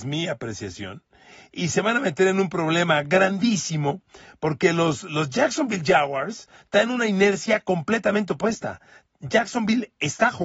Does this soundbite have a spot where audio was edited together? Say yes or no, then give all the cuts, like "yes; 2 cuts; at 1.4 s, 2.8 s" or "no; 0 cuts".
no; 0 cuts